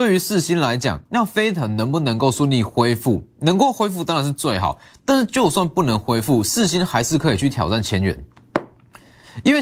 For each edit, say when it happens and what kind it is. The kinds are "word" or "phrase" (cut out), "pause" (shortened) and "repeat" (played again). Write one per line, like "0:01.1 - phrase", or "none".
0:01.1 - pause